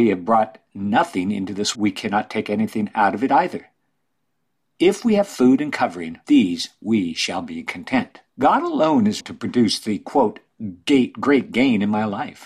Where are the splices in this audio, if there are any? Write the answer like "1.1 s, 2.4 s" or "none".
1.7 s, 6.2 s, 8.3 s, 9.2 s